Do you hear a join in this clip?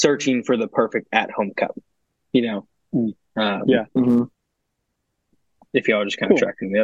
no; 0 cuts

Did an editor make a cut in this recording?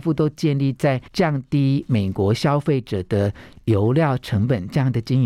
yes; 1 cut; at 1.1 s

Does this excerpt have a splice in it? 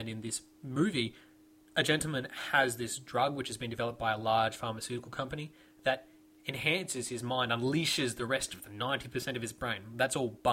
no; 0 cuts

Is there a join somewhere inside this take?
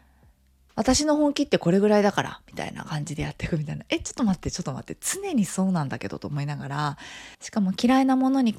yes; 1 cut; at 7.3 s

